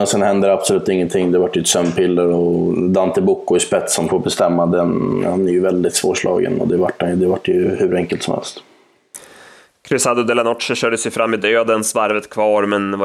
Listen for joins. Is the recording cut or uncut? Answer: uncut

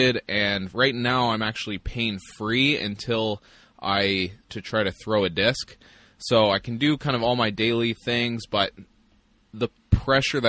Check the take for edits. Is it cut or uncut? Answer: cut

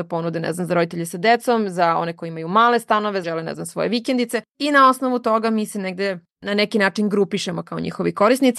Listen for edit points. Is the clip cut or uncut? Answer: cut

